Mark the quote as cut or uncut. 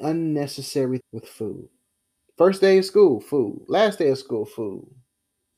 cut